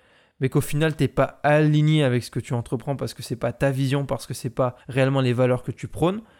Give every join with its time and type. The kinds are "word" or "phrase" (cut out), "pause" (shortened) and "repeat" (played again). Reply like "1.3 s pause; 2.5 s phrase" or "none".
4.8 s pause